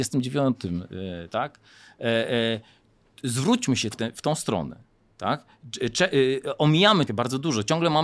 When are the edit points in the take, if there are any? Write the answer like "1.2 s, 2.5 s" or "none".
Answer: 3.9 s, 7.1 s